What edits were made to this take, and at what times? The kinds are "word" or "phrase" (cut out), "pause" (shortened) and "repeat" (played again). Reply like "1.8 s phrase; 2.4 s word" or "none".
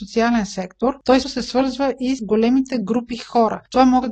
1.2 s word; 2.2 s word